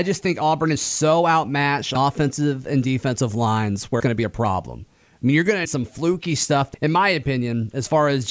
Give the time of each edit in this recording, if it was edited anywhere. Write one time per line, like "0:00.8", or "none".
0:01.9
0:04.0
0:05.6
0:06.7